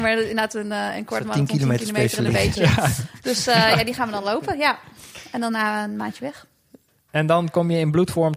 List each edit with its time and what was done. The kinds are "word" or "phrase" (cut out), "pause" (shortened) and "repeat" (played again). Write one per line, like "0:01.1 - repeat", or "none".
none

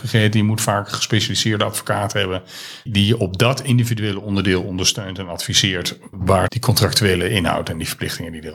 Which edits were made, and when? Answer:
0:02.9 - word
0:06.1 - word
0:06.5 - phrase

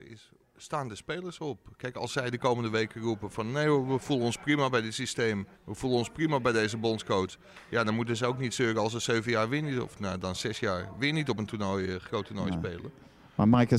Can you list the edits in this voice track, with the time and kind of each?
0:05.5 - pause

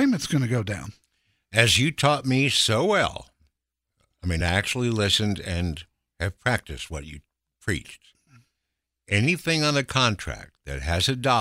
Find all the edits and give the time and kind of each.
none

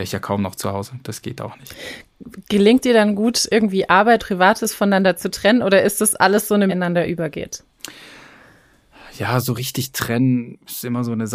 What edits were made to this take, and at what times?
0:02.8 - word
0:04.2 - word
0:06.7 - phrase

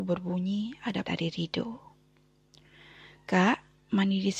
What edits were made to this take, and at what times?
0:01.0 - word

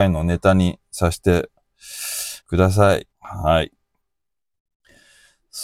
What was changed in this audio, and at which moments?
0:02.4 - pause
0:03.1 - pause

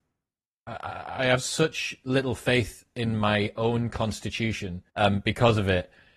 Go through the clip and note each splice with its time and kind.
0:04.9 - pause

